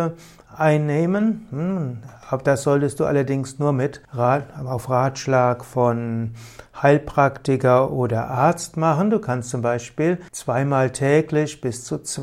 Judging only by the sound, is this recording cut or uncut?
cut